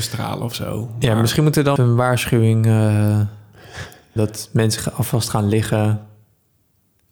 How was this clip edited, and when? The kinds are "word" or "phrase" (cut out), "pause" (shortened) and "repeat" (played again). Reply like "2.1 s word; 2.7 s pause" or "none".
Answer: 1.8 s phrase; 4.2 s word